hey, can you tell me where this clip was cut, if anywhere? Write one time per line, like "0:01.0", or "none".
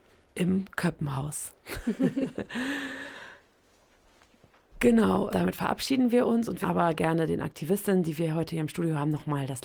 0:05.3
0:06.6